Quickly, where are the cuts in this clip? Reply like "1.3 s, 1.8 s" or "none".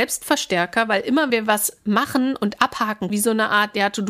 1.3 s, 3.1 s